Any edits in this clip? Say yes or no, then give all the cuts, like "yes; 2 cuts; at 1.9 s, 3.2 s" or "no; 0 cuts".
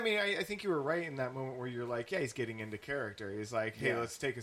no; 0 cuts